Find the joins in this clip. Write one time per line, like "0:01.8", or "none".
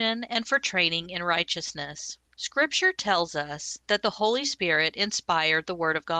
0:02.3